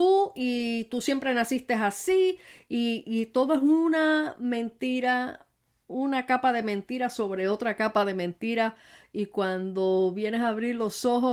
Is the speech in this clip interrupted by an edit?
no; 0 cuts

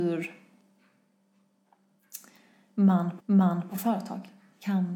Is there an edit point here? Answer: yes; 1 cut; at 3.2 s

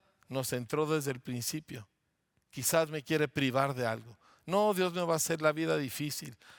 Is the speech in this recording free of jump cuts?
no; 1 cut; at 2.9 s

